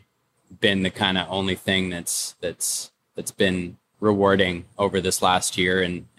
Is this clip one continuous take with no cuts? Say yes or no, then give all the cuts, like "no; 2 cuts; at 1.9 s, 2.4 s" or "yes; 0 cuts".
yes; 0 cuts